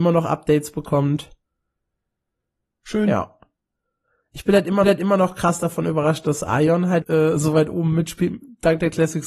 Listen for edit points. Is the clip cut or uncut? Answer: cut